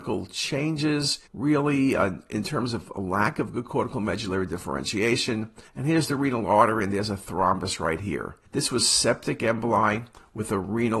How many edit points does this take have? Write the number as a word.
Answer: three